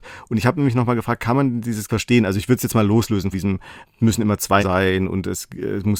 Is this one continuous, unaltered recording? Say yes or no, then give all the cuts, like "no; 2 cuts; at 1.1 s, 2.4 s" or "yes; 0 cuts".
no; 4 cuts; at 1.9 s, 3.3 s, 4.0 s, 4.6 s